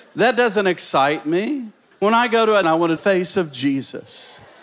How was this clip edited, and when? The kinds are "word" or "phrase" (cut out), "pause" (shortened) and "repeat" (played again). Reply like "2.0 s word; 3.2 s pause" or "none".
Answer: 1.9 s pause; 2.6 s word; 3.0 s phrase